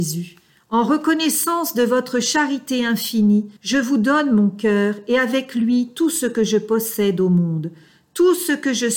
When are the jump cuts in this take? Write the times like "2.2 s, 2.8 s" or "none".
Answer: 3.6 s